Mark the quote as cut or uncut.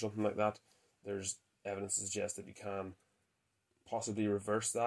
uncut